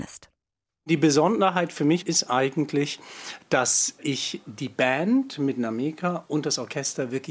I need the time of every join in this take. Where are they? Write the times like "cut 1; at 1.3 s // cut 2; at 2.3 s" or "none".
none